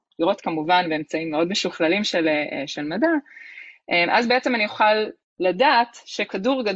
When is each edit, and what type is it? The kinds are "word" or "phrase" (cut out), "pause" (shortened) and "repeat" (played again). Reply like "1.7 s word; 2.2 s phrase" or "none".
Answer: none